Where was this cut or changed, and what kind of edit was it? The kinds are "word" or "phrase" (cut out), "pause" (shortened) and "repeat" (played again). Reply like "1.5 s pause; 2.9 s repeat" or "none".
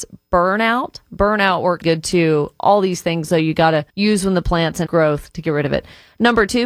1.8 s word; 3.9 s pause; 4.9 s word